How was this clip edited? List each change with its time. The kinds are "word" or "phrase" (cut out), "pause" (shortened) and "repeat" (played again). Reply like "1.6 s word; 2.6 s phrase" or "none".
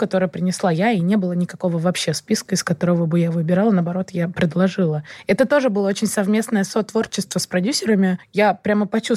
none